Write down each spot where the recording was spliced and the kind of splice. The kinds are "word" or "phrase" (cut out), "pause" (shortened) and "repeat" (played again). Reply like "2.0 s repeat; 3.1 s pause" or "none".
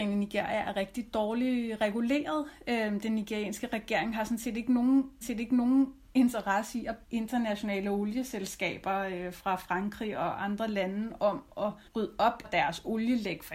5.2 s repeat; 7.0 s word; 11.9 s pause; 12.4 s word